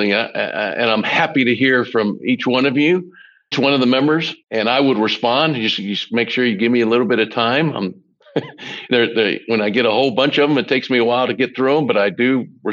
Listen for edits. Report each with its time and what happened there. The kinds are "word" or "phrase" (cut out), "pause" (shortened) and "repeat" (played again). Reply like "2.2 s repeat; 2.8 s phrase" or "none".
3.5 s word; 4.4 s pause